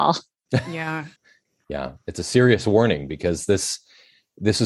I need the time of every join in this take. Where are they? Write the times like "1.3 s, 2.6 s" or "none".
1.2 s